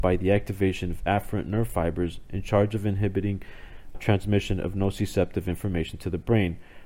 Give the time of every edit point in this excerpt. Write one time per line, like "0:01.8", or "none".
0:03.9